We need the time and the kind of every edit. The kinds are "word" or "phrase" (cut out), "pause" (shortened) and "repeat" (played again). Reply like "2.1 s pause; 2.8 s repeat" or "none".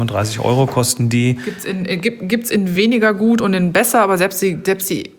none